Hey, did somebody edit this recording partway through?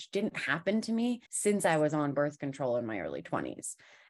yes; 1 cut; at 1.3 s

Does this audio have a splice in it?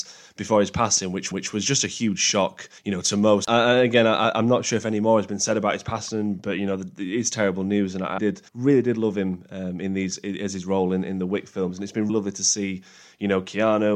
yes; 5 cuts; at 1.3 s, 2.8 s, 8.2 s, 8.5 s, 12.1 s

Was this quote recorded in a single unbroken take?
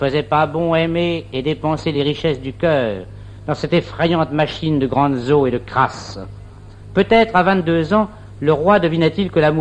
yes; 0 cuts

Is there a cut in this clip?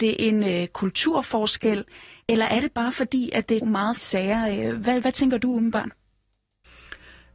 yes; 2 cuts; at 3.6 s, 4.0 s

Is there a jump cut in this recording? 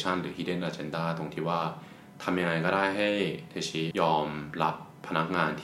yes; 1 cut; at 3.9 s

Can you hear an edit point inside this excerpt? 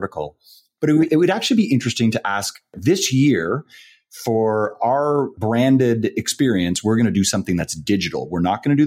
no; 0 cuts

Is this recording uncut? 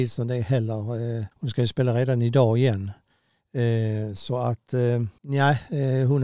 no; 2 cuts; at 1.3 s, 5.2 s

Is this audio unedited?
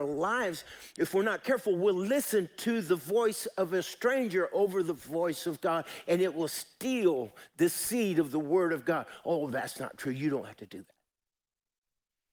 yes; 0 cuts

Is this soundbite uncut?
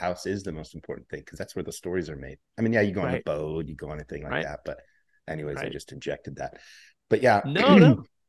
yes; 0 cuts

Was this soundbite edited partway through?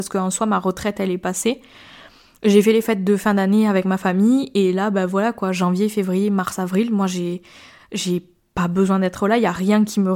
no; 0 cuts

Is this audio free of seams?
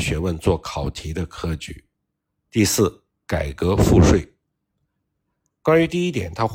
yes; 0 cuts

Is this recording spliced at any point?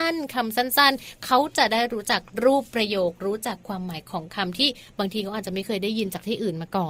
no; 0 cuts

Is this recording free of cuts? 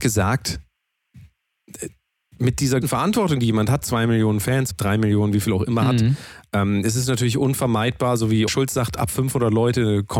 no; 4 cuts; at 2.8 s, 3.8 s, 4.7 s, 8.5 s

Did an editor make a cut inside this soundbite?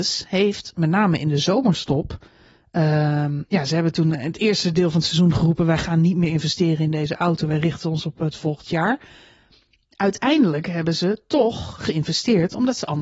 no; 0 cuts

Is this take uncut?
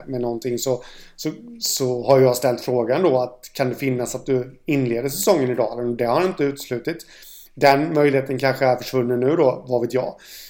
yes; 0 cuts

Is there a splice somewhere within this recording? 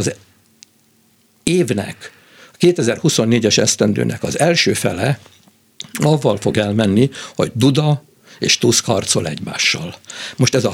no; 0 cuts

